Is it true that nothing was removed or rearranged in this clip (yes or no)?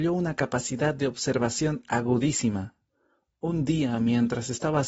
yes